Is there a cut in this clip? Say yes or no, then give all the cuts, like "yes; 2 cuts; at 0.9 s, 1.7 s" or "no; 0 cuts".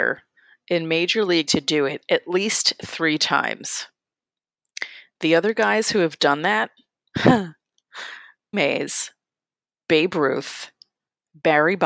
yes; 2 cuts; at 1.4 s, 8.5 s